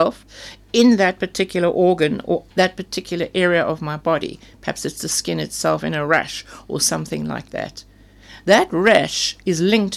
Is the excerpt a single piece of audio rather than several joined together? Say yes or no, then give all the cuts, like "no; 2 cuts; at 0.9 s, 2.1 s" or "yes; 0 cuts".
no; 1 cut; at 2.5 s